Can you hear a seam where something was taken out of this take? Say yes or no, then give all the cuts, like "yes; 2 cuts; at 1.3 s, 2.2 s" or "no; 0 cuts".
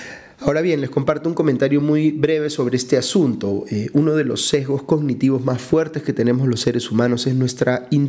no; 0 cuts